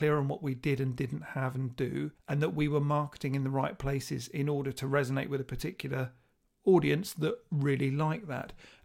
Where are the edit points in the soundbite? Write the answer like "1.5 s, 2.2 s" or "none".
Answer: 2.2 s